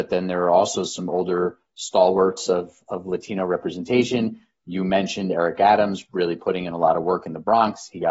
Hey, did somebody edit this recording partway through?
no; 0 cuts

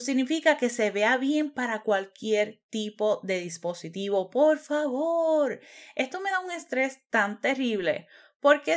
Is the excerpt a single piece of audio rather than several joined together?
yes; 0 cuts

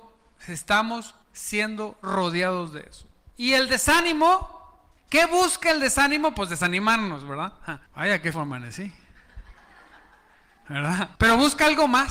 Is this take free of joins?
no; 5 cuts; at 1.2 s, 5.0 s, 7.9 s, 8.3 s, 11.1 s

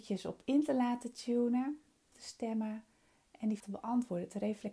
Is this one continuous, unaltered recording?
no; 2 cuts; at 2.1 s, 3.6 s

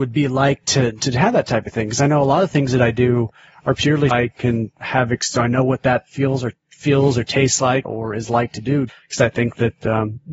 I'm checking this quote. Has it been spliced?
yes; 3 cuts; at 4.1 s, 7.8 s, 8.9 s

